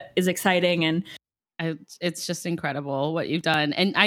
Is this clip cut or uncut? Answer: uncut